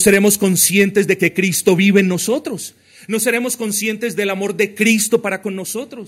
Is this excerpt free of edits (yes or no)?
yes